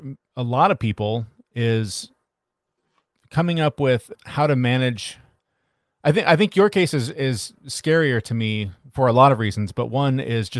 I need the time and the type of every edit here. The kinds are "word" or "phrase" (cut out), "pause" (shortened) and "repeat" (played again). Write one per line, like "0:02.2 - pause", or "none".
none